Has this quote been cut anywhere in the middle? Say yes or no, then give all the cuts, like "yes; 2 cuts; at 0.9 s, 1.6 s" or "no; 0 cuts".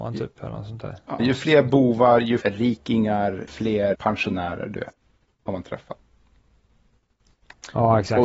yes; 4 cuts; at 1.2 s, 2.4 s, 3.5 s, 3.9 s